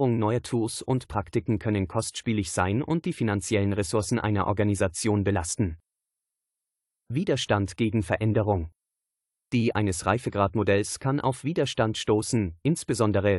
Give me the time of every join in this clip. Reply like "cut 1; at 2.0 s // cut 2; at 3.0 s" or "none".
cut 1; at 9.7 s